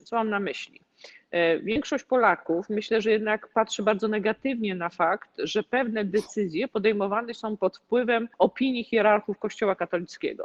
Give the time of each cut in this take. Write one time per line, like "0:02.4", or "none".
0:08.3